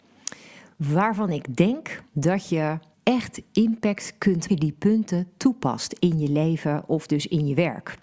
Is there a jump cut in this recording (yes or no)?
yes